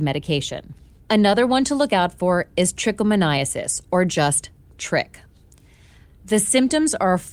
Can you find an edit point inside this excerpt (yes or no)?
no